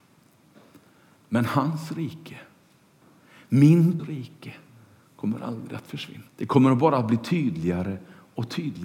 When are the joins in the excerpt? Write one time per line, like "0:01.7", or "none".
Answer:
0:04.0
0:06.3